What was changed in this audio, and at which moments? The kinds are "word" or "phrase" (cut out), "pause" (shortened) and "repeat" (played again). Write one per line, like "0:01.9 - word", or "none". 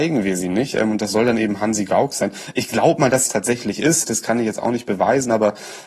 0:03.3 - phrase